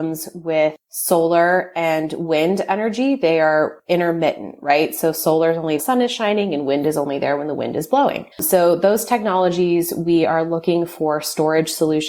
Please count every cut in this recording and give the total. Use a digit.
2